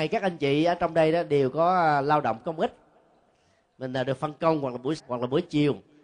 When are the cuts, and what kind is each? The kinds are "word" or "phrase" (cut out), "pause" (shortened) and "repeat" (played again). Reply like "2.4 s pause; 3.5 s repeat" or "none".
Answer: 5.0 s word